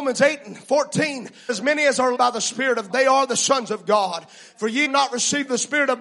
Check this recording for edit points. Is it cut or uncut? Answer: cut